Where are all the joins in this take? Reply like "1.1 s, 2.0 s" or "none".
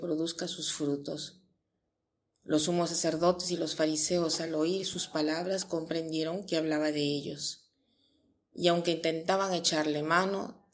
none